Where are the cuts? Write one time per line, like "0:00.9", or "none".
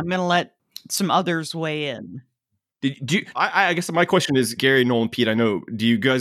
0:03.3
0:04.6